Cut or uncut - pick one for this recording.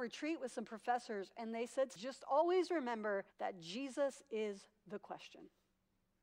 cut